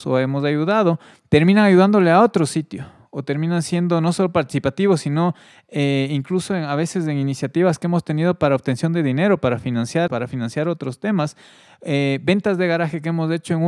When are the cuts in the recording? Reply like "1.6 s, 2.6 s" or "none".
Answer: 10.1 s